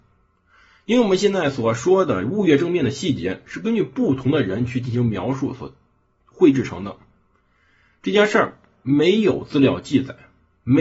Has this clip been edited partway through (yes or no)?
no